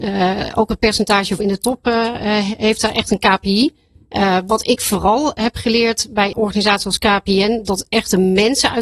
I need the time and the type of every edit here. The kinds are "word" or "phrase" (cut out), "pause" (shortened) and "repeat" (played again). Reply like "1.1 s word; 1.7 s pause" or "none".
1.4 s word; 6.3 s word

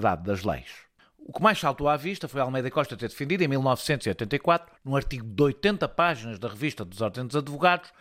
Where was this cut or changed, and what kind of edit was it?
4.8 s pause

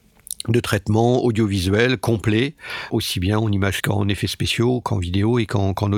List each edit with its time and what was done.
2.9 s word; 3.8 s word; 4.8 s word

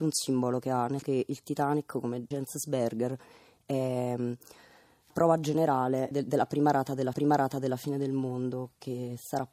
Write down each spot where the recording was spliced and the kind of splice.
1.0 s word; 2.3 s word; 5.1 s word; 6.1 s word; 7.1 s repeat

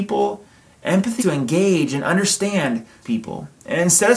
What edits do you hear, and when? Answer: 1.2 s word; 3.0 s word

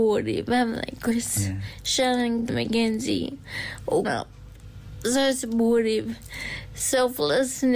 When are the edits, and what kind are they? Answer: 2.5 s word; 4.0 s word

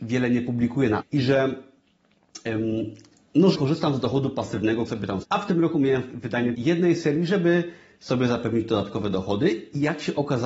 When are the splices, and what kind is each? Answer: 1.0 s word; 3.5 s word; 4.9 s word; 5.2 s word; 6.1 s word; 6.5 s word

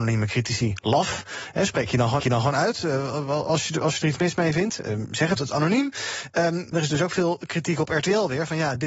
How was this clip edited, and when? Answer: 2.2 s repeat; 5.4 s phrase; 6.7 s word

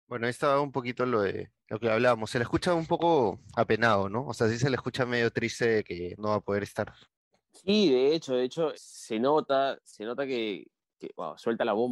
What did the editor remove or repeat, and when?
1.6 s pause; 6.2 s word; 7.0 s pause; 8.7 s word

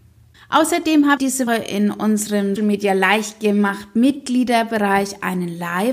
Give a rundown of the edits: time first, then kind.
1.2 s word; 1.5 s word; 2.6 s word

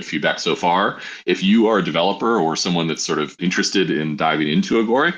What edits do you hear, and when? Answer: 3.4 s word

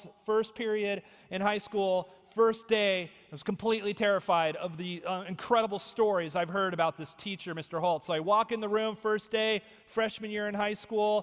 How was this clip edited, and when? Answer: none

